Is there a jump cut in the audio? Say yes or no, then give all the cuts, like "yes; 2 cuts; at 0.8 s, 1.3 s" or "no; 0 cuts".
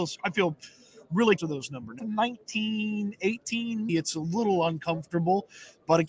yes; 3 cuts; at 1.4 s, 2.0 s, 3.9 s